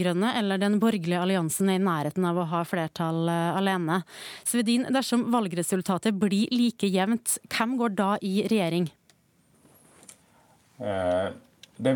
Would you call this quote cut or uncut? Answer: uncut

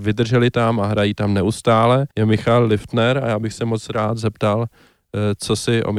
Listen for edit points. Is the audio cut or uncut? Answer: cut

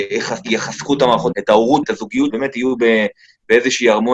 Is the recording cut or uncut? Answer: cut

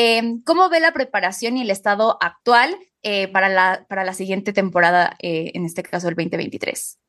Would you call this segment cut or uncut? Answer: uncut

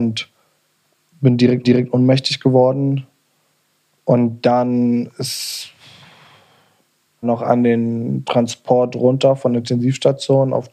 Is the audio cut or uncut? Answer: cut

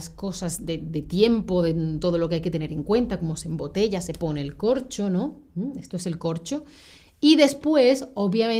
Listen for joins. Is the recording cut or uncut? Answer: uncut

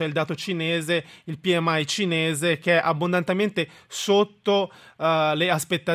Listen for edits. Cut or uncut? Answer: uncut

